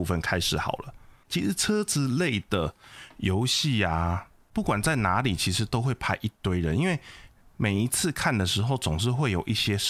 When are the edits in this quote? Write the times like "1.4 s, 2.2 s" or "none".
none